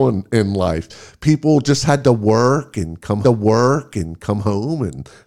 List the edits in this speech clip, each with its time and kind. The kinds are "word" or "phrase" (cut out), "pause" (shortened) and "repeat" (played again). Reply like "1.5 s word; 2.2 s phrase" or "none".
3.2 s repeat